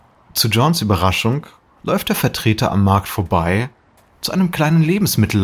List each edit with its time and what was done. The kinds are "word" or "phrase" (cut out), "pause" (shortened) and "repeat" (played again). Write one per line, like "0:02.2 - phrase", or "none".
none